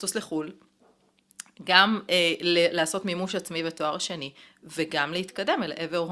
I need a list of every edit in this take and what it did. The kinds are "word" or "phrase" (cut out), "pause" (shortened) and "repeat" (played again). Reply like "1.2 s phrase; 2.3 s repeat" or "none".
none